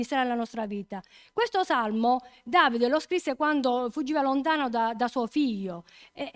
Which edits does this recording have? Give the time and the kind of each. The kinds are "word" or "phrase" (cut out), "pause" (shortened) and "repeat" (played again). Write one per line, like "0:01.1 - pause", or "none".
none